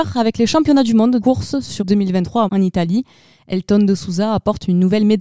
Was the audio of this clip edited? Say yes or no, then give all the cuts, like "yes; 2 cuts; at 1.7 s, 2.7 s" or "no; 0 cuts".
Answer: yes; 3 cuts; at 1.2 s, 1.8 s, 2.5 s